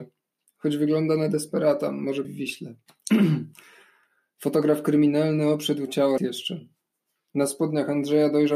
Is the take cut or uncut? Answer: cut